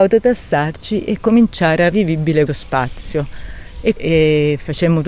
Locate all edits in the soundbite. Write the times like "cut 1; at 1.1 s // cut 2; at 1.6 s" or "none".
cut 1; at 1.9 s // cut 2; at 2.5 s // cut 3; at 4.0 s